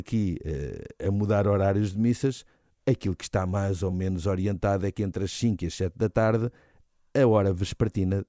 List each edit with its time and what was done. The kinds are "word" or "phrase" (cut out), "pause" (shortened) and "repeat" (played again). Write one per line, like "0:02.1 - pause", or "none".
none